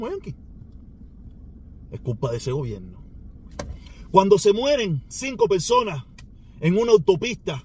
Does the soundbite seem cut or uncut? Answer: uncut